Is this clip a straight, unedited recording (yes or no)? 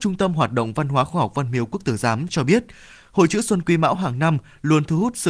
yes